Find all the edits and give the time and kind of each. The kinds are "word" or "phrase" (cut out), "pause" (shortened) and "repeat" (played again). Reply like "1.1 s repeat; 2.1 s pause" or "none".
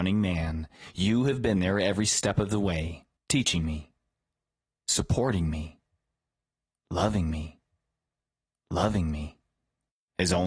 3.2 s pause; 7.3 s repeat